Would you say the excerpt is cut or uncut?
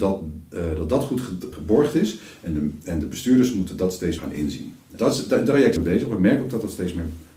cut